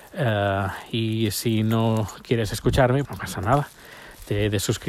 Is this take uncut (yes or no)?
no